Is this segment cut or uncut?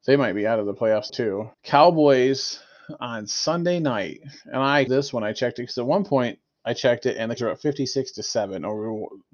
cut